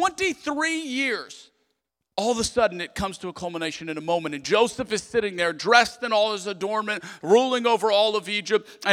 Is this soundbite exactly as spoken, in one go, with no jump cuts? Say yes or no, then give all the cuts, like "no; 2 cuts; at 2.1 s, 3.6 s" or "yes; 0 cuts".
no; 1 cut; at 1.9 s